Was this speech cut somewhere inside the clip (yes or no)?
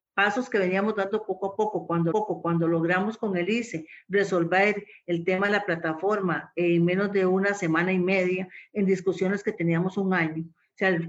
yes